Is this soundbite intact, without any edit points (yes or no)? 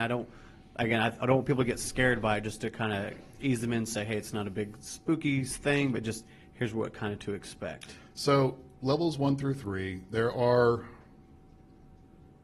yes